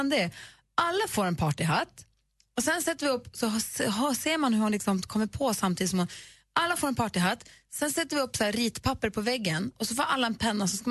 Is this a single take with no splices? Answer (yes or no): yes